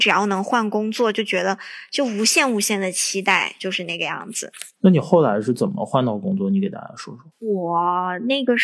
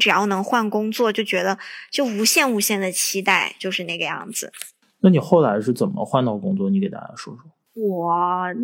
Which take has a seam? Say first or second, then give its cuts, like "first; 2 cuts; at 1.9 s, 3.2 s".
first; 2 cuts; at 4.7 s, 7.3 s